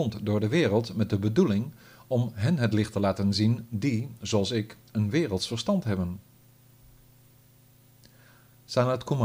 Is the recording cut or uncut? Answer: uncut